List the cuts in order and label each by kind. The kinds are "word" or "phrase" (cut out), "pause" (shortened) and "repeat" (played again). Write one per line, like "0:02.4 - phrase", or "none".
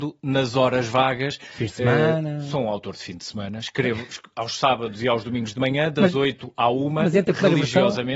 none

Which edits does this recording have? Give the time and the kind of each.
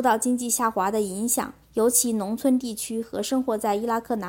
0:01.6 - pause

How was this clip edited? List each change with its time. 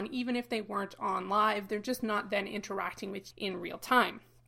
0:03.3 - word

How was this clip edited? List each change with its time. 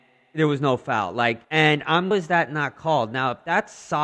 0:01.4 - pause
0:02.1 - phrase

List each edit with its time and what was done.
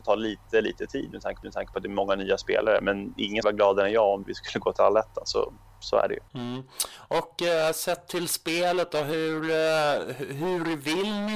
0:01.4 - repeat
0:03.4 - word
0:04.2 - word
0:06.3 - pause

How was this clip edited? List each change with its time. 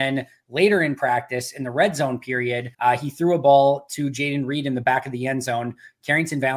0:02.7 - pause

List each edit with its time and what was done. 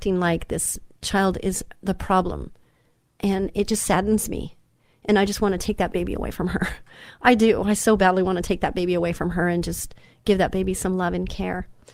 none

